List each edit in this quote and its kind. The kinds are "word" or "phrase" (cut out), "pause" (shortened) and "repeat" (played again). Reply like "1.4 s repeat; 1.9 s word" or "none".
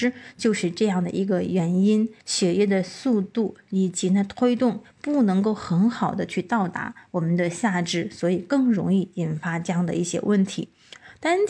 2.2 s pause